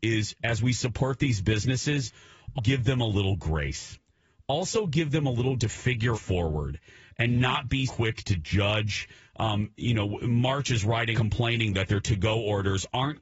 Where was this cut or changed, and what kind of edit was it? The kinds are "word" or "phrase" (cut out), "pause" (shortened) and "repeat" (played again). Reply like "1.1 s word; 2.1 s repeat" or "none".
2.6 s word; 5.6 s word; 6.1 s phrase; 7.9 s word; 11.1 s phrase